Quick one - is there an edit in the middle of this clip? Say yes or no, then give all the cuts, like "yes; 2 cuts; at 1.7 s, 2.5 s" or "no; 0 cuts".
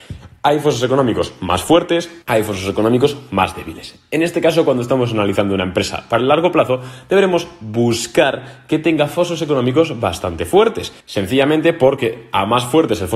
yes; 2 cuts; at 2.2 s, 11.0 s